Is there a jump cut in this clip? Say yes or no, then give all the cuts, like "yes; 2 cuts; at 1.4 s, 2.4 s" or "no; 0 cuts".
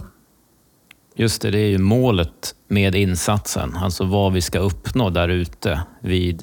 no; 0 cuts